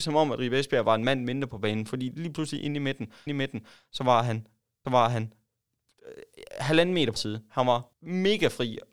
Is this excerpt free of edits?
no; 4 cuts; at 3.3 s, 4.8 s, 7.2 s, 7.9 s

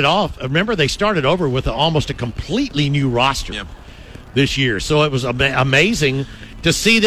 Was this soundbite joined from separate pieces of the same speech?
no; 0 cuts

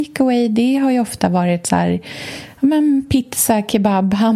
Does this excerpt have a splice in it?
no; 0 cuts

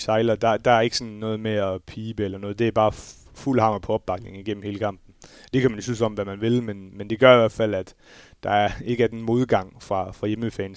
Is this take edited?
no; 0 cuts

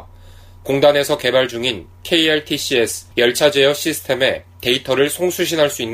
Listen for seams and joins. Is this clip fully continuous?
no; 1 cut; at 3.1 s

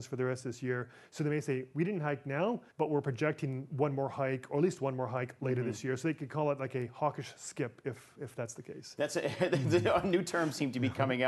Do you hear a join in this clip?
yes; 1 cut; at 2.7 s

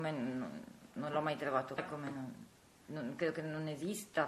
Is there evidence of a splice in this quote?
yes; 1 cut; at 1.8 s

